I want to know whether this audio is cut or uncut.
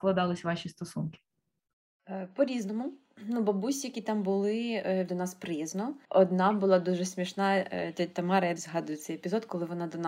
cut